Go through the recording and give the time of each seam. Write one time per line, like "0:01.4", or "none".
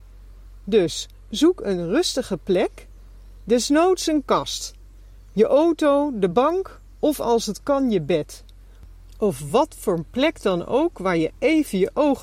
none